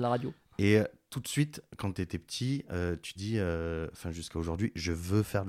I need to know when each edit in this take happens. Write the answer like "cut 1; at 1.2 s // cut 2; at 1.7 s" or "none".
cut 1; at 3.2 s